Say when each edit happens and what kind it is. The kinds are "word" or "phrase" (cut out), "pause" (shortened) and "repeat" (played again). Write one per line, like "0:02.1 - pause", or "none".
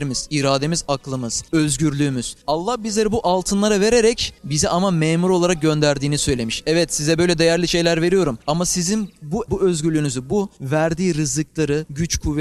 0:09.5 - word